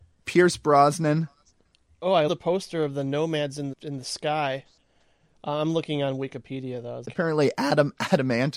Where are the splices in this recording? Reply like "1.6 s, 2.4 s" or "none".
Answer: 2.3 s, 3.7 s, 7.0 s